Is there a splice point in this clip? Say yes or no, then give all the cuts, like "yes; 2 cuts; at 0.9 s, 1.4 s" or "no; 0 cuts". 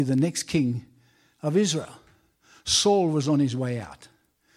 no; 0 cuts